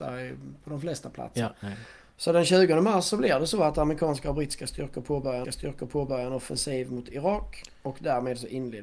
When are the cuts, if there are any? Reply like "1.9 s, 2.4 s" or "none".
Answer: 5.4 s